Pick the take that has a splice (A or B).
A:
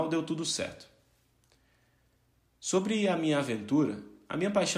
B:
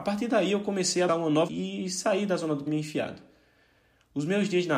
B